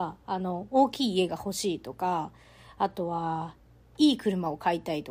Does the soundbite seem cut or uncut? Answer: uncut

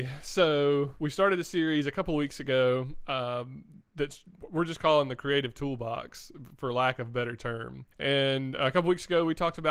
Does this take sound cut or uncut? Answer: cut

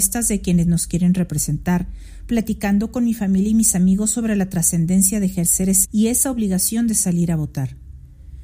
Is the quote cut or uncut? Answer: cut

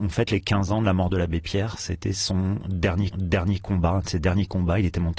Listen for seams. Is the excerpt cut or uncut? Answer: cut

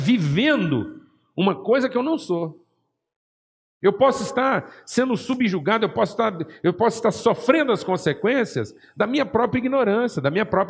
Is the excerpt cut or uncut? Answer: uncut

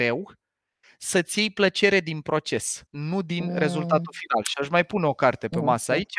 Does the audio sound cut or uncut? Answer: cut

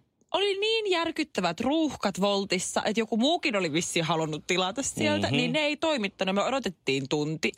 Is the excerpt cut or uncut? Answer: uncut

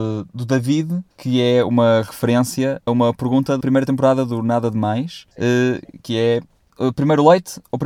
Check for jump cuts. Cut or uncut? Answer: cut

